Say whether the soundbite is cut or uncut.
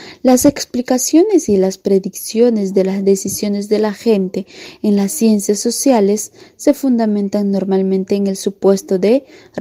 uncut